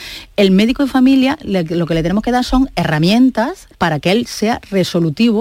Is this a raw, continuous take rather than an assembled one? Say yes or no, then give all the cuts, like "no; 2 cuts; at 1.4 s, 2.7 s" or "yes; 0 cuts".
no; 1 cut; at 3.7 s